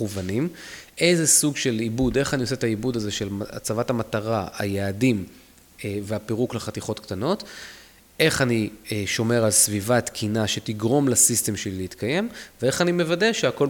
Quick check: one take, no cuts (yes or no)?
yes